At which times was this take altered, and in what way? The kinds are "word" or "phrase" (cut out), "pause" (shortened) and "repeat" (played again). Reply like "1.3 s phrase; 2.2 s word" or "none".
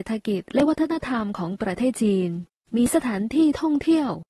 none